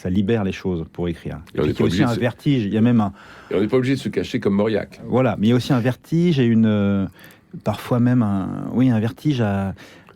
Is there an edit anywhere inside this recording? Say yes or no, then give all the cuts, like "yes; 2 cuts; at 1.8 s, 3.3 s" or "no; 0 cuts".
no; 0 cuts